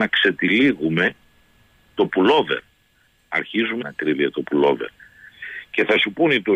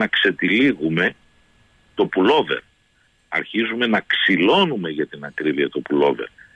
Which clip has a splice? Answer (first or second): first